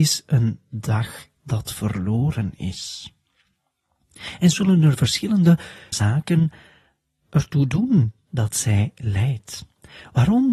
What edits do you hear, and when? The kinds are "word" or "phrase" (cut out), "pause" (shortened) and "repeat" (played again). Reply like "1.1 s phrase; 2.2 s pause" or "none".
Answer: 4.5 s word; 5.9 s word